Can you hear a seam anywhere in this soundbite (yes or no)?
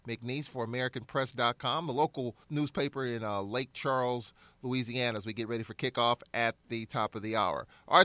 yes